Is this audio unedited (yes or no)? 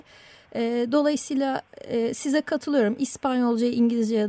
yes